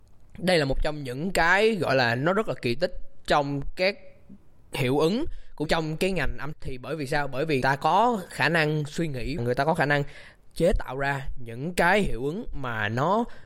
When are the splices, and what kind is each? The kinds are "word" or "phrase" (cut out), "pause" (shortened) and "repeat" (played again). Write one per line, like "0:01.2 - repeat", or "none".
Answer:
0:05.7 - word
0:06.5 - word
0:07.6 - word
0:09.4 - word